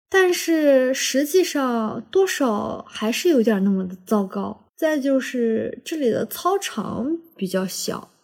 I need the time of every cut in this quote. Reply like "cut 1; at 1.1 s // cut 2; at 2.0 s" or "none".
cut 1; at 4.7 s